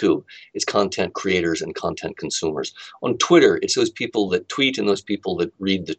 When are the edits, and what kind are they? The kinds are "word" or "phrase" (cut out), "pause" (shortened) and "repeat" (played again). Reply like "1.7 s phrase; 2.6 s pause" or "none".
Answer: none